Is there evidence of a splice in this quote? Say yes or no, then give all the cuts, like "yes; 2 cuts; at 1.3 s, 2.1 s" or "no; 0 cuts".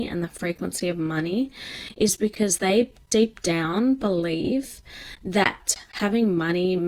no; 0 cuts